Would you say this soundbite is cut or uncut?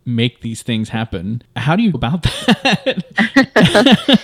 cut